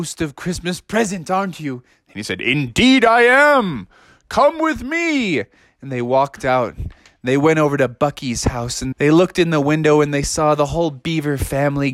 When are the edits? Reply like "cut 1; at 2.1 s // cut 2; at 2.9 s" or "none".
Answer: cut 1; at 8.9 s